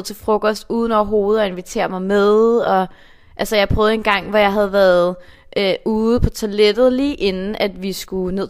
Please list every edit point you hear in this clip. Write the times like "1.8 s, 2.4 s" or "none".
none